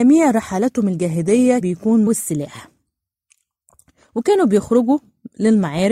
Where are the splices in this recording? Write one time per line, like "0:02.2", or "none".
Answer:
0:01.6
0:02.1